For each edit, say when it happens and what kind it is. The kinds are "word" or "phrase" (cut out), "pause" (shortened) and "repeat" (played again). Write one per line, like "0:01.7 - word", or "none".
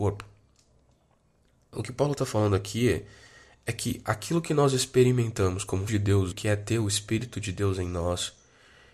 0:05.9 - word
0:06.3 - word

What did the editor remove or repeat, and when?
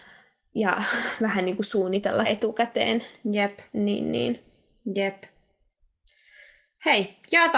0:02.2 - word

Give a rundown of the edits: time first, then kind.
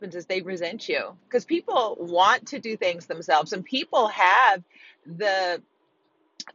none

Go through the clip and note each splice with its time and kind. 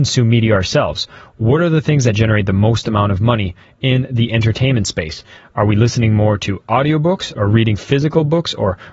none

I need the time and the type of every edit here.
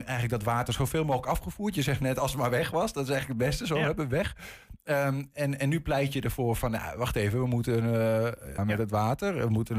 0:08.6 - phrase

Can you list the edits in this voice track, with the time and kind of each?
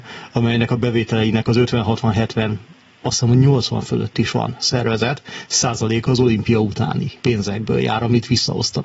0:07.2 - pause

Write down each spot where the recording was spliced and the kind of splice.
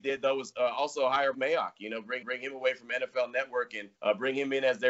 0:01.3 - word
0:02.2 - repeat
0:03.9 - pause

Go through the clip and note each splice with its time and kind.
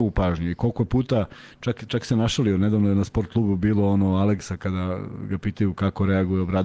none

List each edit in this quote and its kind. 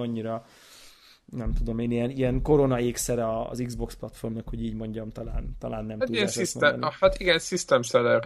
none

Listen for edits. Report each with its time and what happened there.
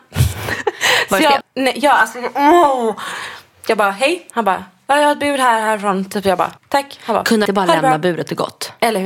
0:01.4 - word
0:06.6 - pause
0:07.5 - phrase

